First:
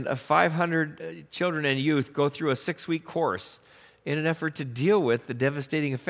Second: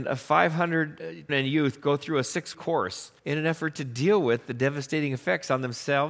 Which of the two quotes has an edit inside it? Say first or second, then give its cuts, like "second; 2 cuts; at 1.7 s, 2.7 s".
second; 3 cuts; at 1.3 s, 2.5 s, 3.2 s